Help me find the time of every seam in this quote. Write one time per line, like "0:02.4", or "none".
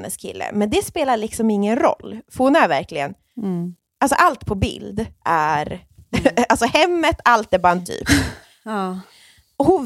0:07.8

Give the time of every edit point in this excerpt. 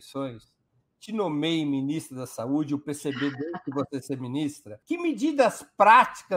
0:04.8

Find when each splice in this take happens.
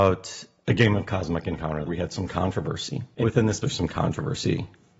0:01.9
0:03.2
0:03.6

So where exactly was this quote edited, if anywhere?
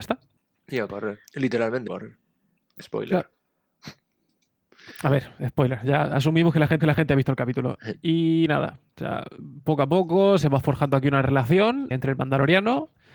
0:01.3
0:01.9
0:06.8
0:11.9

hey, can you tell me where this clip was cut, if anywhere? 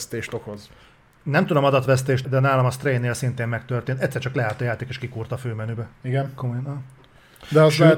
0:02.2

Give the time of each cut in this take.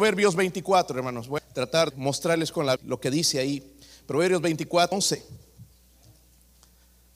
0:01.4
0:01.9
0:02.8
0:04.9

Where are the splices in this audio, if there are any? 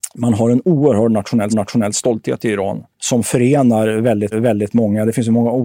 0:01.5
0:02.9
0:04.3

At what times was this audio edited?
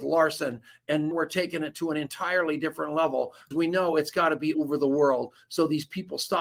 0:01.1
0:03.5
0:04.5

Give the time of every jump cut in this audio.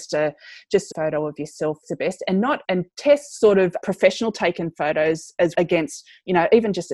0:00.9
0:01.8
0:02.6
0:03.8
0:05.5

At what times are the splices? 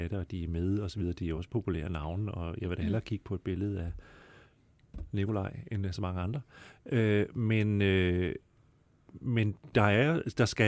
none

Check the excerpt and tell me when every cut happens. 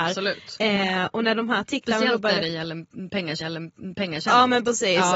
0:03.4

